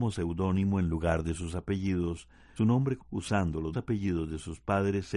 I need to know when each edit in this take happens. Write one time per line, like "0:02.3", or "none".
0:02.6
0:03.0
0:03.7